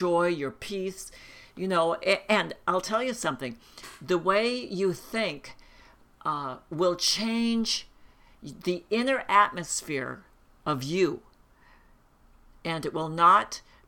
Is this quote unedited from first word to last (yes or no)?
yes